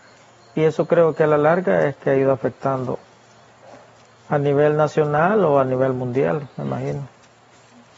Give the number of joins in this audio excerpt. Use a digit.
0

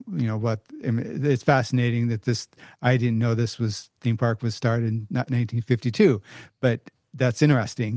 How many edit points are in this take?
0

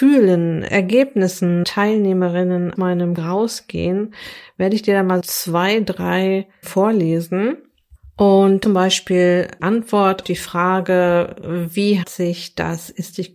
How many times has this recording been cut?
9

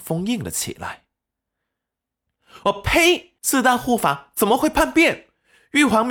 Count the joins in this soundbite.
1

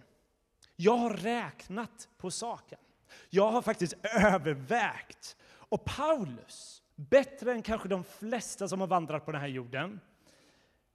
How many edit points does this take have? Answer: 2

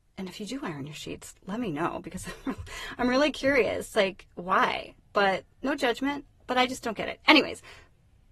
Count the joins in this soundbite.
1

